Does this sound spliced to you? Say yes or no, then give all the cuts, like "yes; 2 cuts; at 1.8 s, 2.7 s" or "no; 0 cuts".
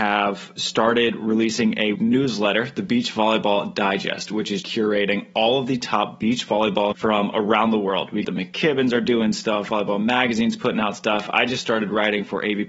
yes; 4 cuts; at 1.9 s, 4.6 s, 6.9 s, 8.2 s